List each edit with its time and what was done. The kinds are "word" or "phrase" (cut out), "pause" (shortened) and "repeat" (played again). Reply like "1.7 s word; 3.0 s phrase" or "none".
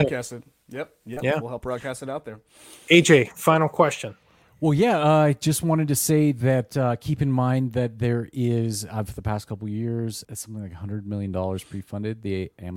10.2 s word